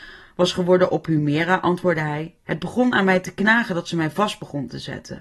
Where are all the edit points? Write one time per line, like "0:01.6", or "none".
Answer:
0:02.4

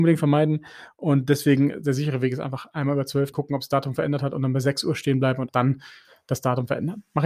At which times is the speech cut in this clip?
0:03.3
0:05.5

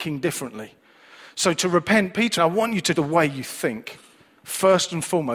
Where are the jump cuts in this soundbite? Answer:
0:02.4
0:03.0

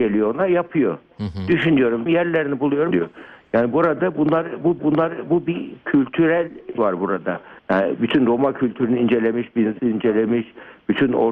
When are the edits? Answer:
0:02.1
0:02.9
0:04.8
0:06.8
0:07.6
0:09.8

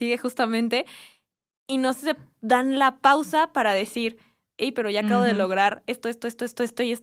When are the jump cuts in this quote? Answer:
none

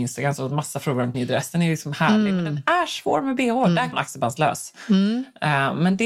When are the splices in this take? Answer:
0:01.1
0:03.9

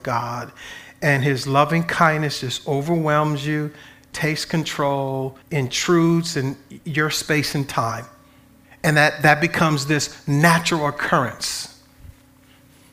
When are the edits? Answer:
0:05.4
0:06.8
0:08.6

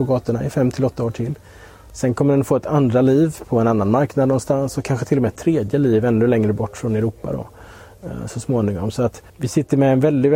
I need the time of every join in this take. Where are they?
0:09.3

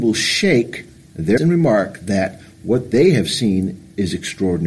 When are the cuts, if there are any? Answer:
0:01.4

